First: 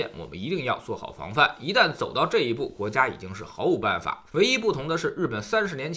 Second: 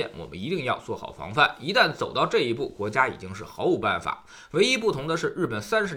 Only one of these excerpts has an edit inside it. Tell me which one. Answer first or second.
first